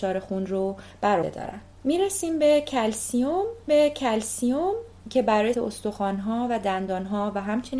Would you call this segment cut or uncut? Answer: cut